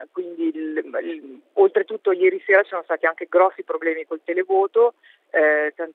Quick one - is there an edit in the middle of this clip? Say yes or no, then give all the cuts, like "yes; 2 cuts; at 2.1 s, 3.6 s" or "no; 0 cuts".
no; 0 cuts